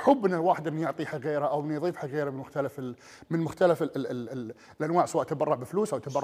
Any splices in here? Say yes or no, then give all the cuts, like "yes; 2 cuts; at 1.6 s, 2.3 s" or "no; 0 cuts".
no; 0 cuts